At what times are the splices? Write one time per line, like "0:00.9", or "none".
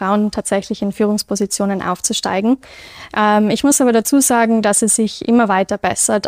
none